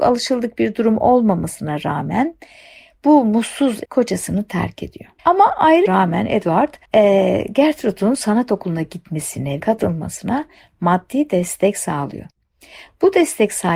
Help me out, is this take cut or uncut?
cut